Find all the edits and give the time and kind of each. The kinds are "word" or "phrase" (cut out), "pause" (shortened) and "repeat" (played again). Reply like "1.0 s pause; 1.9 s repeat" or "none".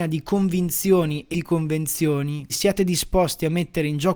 1.3 s word; 2.5 s word

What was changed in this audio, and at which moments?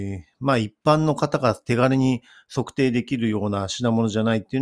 none

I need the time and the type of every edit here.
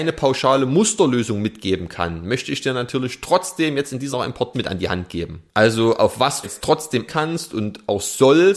4.1 s word; 4.5 s word; 6.4 s phrase; 7.1 s word

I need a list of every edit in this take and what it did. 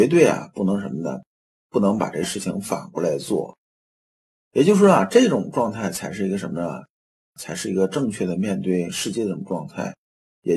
none

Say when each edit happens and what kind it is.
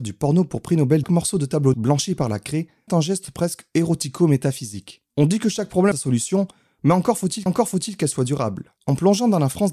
1.0 s phrase; 1.7 s word; 2.9 s word; 5.1 s pause; 5.9 s phrase; 7.5 s repeat; 8.8 s pause

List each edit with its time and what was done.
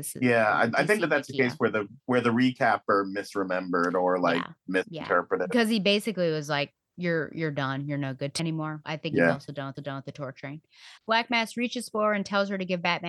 2.0 s pause; 8.4 s word; 8.8 s word; 9.7 s repeat; 11.0 s pause

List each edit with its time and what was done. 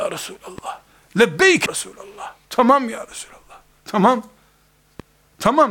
1.7 s phrase; 2.4 s pause

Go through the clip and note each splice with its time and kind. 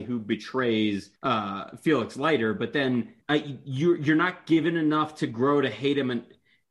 1.2 s pause; 3.2 s pause

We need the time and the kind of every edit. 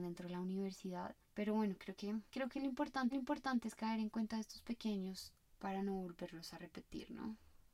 1.2 s pause; 2.3 s pause; 3.1 s repeat; 5.5 s phrase

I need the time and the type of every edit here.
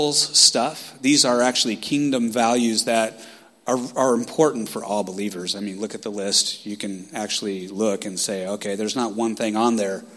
none

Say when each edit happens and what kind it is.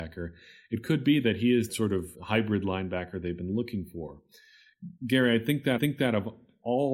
1.7 s word; 2.1 s word; 5.0 s pause; 5.8 s repeat

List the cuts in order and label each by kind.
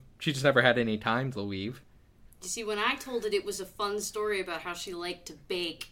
none

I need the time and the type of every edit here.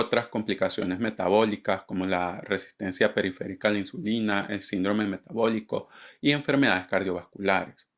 none

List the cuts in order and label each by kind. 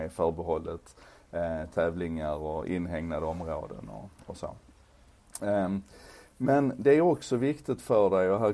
none

